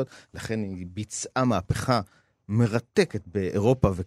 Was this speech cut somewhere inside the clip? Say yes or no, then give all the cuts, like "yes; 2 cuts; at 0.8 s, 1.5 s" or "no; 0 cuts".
no; 0 cuts